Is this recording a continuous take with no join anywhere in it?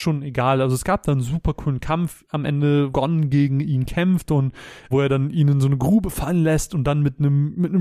no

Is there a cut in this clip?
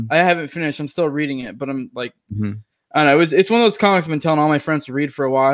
no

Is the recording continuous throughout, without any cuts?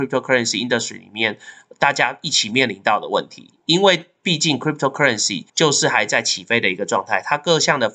no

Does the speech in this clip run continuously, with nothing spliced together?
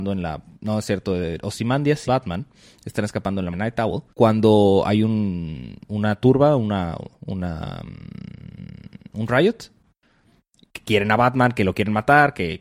no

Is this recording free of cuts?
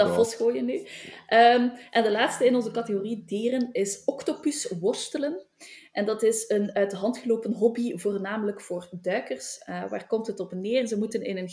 yes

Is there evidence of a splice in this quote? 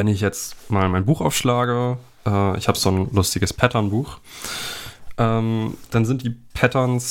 no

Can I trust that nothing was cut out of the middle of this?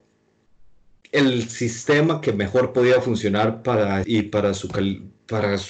no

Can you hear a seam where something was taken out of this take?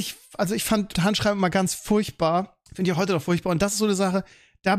yes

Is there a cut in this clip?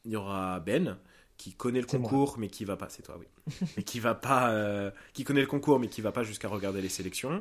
no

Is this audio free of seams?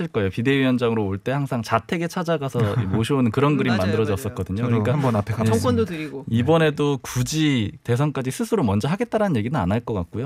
yes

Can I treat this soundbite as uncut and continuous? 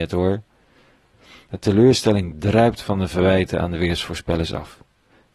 yes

